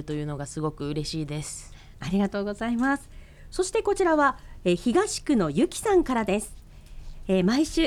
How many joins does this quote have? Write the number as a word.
zero